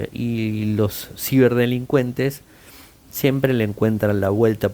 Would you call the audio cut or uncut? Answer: uncut